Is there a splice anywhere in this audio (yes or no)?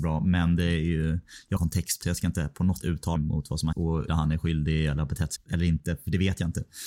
yes